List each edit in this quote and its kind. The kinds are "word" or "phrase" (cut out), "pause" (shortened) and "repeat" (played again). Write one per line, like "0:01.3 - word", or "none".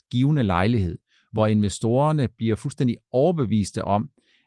none